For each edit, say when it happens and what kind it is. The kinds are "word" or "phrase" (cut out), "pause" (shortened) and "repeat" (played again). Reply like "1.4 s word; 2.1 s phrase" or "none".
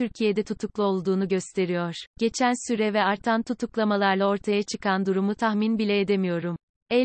2.1 s pause